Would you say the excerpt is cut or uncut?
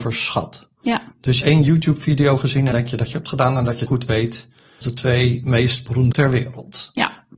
cut